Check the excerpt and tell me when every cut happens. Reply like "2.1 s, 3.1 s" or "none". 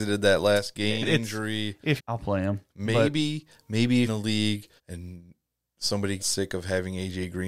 1.0 s, 2.0 s, 2.7 s, 4.1 s, 4.8 s, 6.2 s